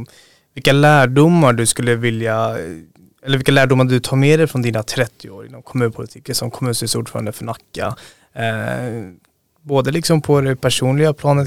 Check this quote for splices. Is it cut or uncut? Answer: uncut